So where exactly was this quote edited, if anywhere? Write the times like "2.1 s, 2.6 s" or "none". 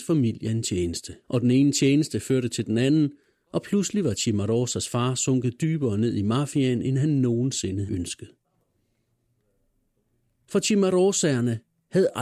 1.2 s, 7.9 s